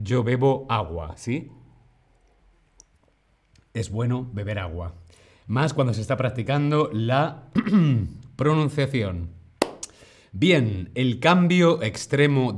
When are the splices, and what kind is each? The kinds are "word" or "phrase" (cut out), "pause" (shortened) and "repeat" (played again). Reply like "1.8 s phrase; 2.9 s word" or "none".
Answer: none